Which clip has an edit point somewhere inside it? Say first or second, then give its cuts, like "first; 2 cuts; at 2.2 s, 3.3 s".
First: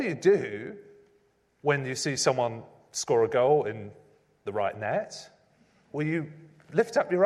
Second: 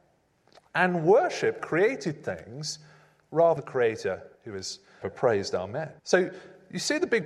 second; 5 cuts; at 1.6 s, 3.6 s, 4.3 s, 5.0 s, 6.0 s